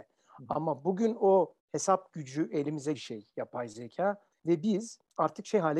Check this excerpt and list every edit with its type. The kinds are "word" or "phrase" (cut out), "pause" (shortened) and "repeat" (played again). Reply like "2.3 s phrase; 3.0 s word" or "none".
1.6 s pause; 2.9 s phrase